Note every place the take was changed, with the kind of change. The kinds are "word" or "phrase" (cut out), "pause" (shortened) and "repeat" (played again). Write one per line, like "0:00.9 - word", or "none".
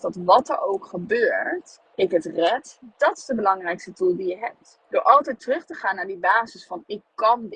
0:01.9 - pause
0:04.8 - pause